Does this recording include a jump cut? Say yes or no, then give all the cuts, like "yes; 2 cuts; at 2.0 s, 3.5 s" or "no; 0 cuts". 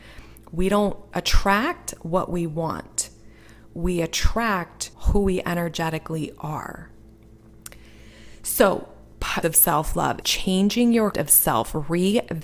yes; 4 cuts; at 4.9 s, 9.4 s, 10.2 s, 11.1 s